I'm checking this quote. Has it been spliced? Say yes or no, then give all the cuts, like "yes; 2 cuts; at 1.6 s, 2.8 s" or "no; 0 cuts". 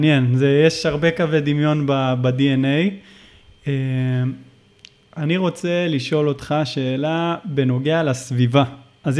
no; 0 cuts